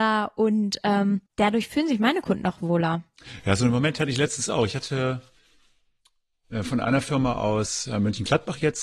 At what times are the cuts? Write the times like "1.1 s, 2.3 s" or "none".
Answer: 1.3 s